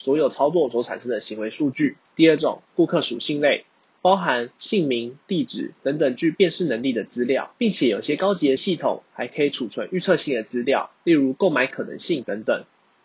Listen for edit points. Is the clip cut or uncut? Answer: cut